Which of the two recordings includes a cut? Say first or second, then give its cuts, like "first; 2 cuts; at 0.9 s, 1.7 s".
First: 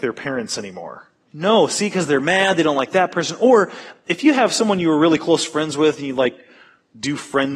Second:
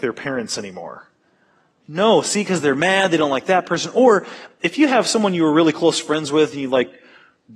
first; 1 cut; at 1.2 s